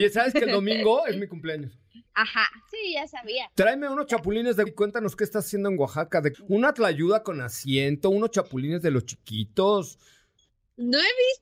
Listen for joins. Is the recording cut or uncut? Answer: cut